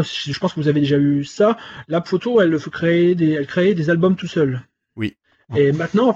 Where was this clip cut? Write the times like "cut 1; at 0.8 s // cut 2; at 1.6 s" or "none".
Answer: none

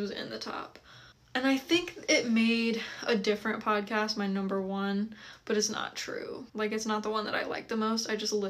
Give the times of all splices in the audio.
cut 1; at 1.1 s // cut 2; at 6.5 s

